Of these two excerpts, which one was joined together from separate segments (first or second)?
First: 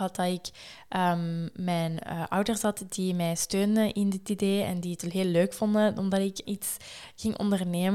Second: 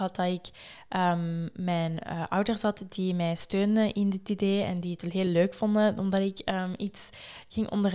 first